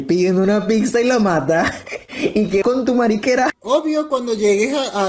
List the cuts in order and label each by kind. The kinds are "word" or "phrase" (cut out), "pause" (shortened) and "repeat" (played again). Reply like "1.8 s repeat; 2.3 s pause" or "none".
2.6 s word